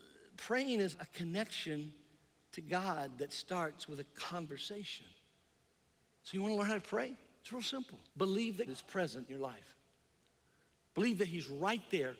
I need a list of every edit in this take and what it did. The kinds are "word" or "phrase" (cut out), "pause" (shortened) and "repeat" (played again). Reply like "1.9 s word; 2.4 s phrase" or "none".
0.9 s word; 8.1 s pause; 8.7 s word; 9.3 s word